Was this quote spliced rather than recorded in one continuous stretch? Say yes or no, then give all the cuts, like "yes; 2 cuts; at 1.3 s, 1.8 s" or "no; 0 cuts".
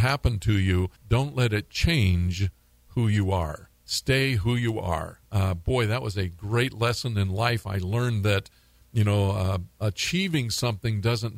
yes; 2 cuts; at 1.0 s, 3.7 s